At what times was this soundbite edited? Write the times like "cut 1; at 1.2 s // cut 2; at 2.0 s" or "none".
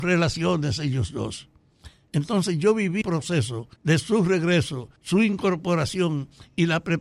cut 1; at 3.0 s // cut 2; at 3.8 s // cut 3; at 5.0 s

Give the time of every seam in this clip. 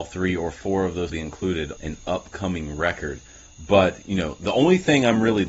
cut 1; at 1.1 s // cut 2; at 1.8 s

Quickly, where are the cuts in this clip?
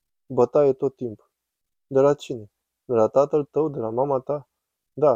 none

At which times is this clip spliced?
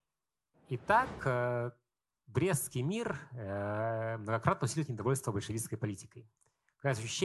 none

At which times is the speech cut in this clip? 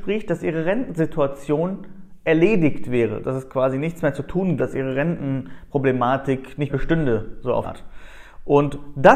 cut 1; at 3.2 s // cut 2; at 4.6 s // cut 3; at 6.7 s // cut 4; at 7.6 s

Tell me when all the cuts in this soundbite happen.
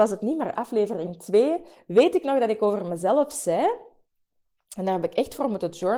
none

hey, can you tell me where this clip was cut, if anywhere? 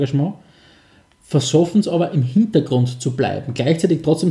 none

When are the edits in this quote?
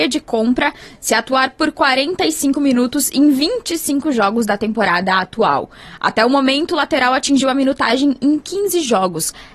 none

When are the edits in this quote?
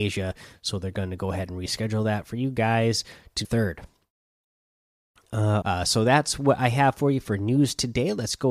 cut 1; at 3.4 s // cut 2; at 5.6 s

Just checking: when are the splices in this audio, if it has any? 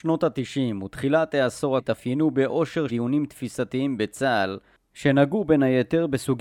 cut 1; at 1.8 s // cut 2; at 2.9 s

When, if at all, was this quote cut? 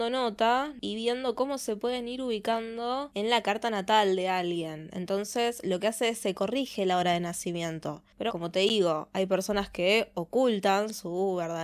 cut 1; at 8.3 s

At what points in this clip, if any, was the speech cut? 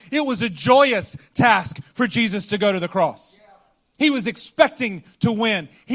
none

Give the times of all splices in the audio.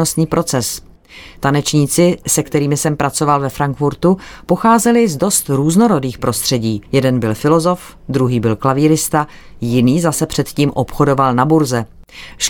cut 1; at 6.9 s

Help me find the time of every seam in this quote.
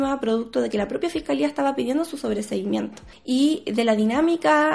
none

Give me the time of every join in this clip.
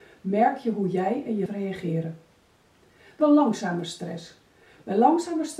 cut 1; at 1.5 s // cut 2; at 3.2 s

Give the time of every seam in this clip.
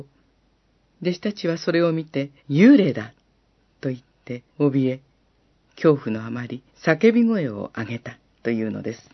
cut 1; at 2.4 s // cut 2; at 4.5 s // cut 3; at 6.7 s

